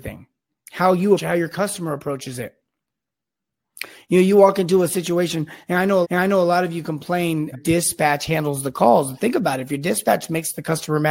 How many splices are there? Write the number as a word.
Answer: three